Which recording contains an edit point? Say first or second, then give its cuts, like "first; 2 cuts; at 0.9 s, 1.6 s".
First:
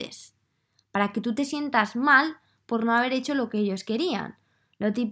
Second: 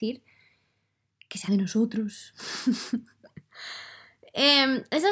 second; 1 cut; at 1.5 s